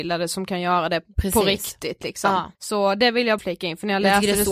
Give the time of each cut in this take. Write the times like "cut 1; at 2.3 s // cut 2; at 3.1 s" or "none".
cut 1; at 2.5 s // cut 2; at 3.4 s